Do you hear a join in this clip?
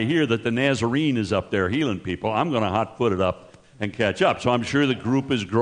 no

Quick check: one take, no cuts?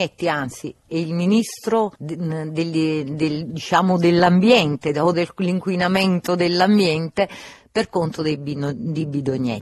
no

